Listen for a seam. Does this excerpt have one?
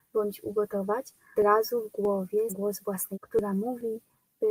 yes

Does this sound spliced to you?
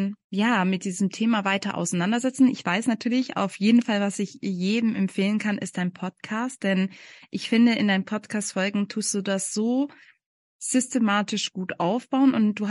no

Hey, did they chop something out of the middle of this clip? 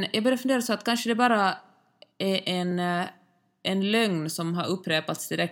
no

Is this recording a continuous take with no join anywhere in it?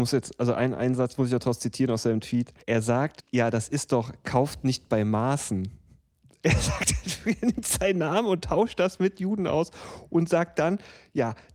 no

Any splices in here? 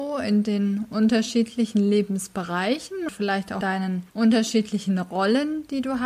yes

